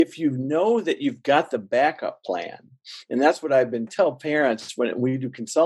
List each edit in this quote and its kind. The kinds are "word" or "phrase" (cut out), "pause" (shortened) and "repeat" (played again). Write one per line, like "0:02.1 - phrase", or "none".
0:03.9 - phrase